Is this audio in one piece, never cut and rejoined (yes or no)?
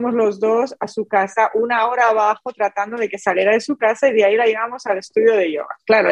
yes